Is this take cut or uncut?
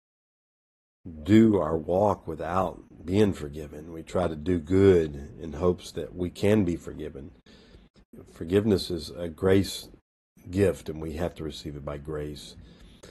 uncut